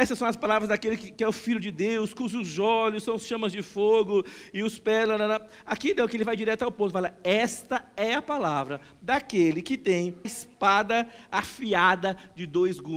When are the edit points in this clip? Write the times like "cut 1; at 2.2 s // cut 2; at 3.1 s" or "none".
cut 1; at 10.2 s